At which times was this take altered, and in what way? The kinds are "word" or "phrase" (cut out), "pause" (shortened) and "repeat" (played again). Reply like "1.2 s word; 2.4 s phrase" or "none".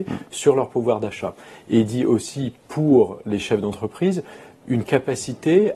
none